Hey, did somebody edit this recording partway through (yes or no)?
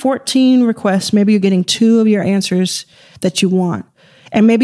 no